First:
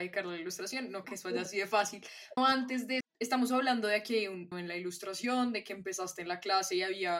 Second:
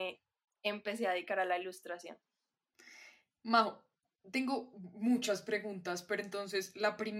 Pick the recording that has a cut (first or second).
first